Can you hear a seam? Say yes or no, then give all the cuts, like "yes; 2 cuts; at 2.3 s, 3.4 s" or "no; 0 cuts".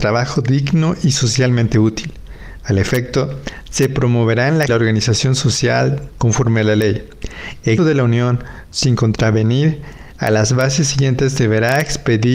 yes; 3 cuts; at 4.7 s, 6.1 s, 7.8 s